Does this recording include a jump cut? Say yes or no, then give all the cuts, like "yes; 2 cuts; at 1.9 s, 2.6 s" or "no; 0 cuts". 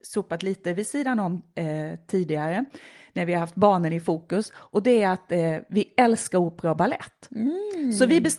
no; 0 cuts